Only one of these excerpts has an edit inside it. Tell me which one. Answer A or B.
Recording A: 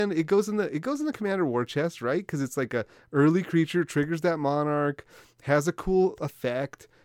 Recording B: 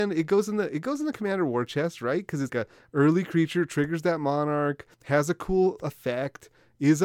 B